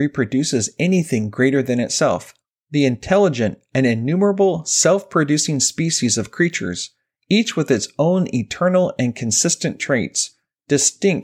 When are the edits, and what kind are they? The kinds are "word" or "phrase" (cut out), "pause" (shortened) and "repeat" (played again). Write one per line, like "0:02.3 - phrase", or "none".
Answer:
none